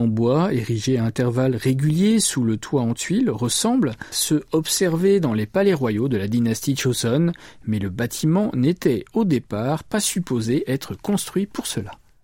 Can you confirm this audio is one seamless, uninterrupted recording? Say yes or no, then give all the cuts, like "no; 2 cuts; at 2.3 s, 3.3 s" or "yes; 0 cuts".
no; 1 cut; at 4.1 s